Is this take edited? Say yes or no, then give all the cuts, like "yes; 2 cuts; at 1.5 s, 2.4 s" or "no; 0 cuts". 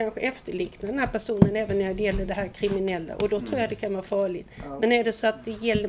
no; 0 cuts